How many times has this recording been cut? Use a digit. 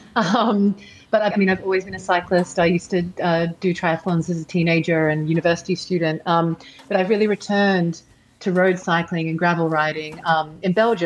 1